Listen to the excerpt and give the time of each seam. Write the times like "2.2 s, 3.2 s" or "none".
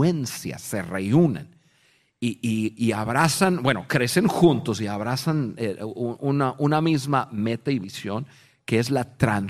none

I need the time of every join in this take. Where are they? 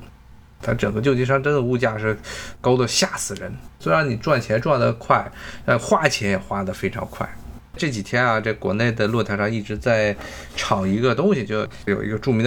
3.7 s, 7.7 s

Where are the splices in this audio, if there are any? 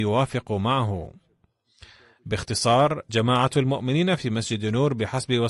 3.1 s

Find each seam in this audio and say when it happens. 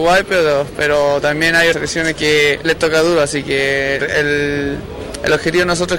1.7 s, 2.6 s, 4.0 s

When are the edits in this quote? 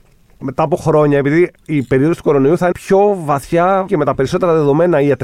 1.6 s, 2.7 s, 3.9 s

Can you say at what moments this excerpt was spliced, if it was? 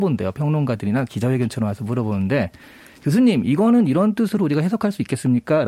none

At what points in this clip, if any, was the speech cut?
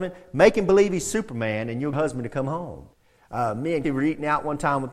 1.9 s, 2.9 s, 3.8 s

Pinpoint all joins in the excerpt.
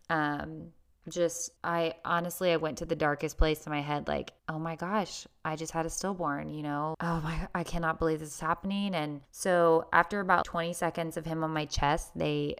1.6 s, 4.4 s, 6.9 s, 9.2 s, 10.4 s

